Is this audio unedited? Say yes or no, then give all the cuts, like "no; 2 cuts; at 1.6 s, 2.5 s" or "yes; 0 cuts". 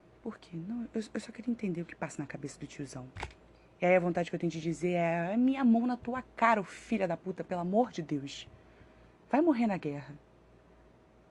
yes; 0 cuts